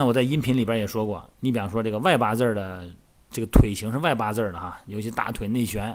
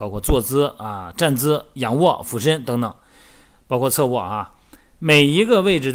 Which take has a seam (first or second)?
first